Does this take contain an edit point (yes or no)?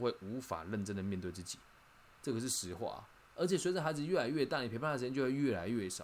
no